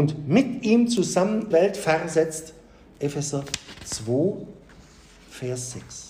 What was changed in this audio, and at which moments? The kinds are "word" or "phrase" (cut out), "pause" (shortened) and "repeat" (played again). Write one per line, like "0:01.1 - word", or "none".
0:01.5 - phrase